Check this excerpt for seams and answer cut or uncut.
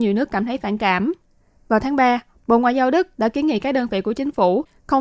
uncut